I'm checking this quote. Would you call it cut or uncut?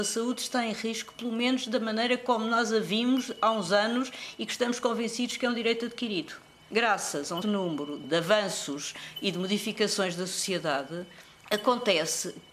cut